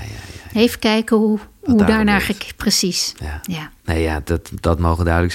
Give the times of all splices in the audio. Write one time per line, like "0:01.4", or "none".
0:03.8